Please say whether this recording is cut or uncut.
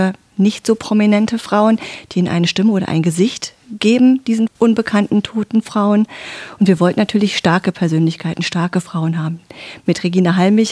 uncut